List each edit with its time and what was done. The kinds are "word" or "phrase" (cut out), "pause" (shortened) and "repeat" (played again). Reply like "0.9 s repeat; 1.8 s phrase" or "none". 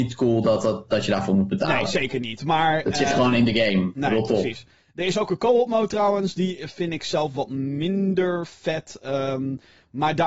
none